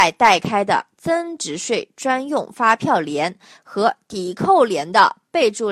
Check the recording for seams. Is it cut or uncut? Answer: uncut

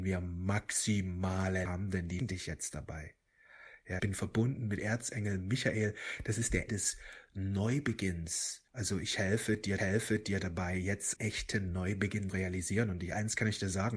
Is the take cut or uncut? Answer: cut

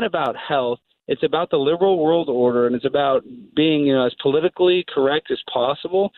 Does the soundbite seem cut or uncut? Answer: uncut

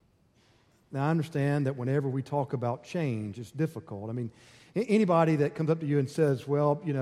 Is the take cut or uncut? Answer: uncut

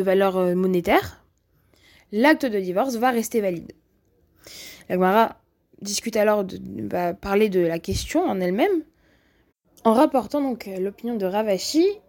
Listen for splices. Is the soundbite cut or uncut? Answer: uncut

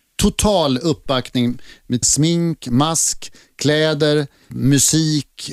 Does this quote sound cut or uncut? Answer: cut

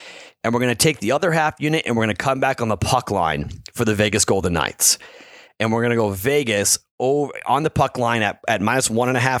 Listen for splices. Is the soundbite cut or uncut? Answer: uncut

